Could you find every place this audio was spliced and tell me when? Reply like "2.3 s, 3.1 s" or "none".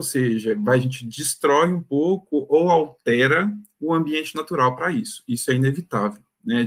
none